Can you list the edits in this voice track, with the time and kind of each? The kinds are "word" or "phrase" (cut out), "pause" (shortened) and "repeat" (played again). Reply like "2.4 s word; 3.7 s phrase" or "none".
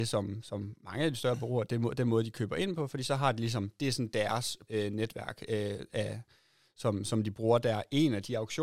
4.7 s word

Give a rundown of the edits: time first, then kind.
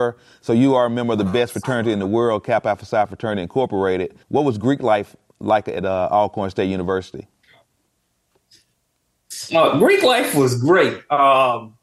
4.2 s pause

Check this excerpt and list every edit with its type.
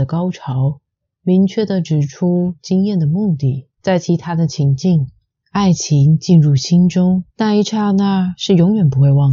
3.8 s pause; 7.3 s pause

